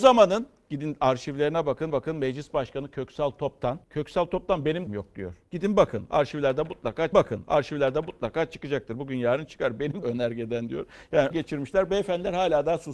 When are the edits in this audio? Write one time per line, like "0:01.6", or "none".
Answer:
0:01.9
0:03.8
0:04.9
0:05.4
0:07.1
0:10.0
0:11.3